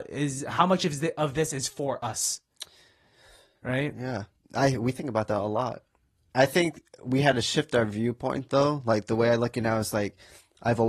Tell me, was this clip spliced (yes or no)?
no